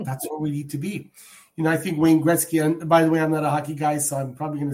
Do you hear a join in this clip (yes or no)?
no